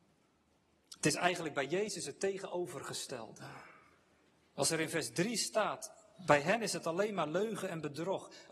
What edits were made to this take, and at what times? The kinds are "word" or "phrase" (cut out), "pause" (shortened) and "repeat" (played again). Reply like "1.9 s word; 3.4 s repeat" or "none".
none